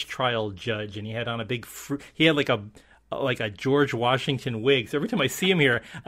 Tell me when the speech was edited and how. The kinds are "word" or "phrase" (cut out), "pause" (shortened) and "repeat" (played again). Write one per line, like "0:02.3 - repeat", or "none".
none